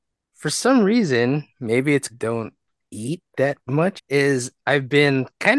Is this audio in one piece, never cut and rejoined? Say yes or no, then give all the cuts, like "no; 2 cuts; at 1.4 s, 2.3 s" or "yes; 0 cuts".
no; 4 cuts; at 1.5 s, 2.1 s, 2.8 s, 4.0 s